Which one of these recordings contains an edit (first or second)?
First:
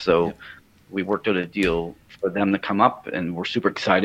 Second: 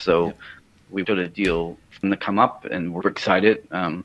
second